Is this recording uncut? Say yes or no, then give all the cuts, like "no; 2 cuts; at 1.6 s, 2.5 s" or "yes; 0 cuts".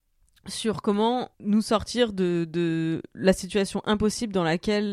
no; 1 cut; at 1.3 s